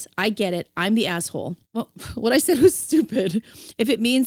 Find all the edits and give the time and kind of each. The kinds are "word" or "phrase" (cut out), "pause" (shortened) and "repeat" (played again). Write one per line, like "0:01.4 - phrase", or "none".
0:01.6 - pause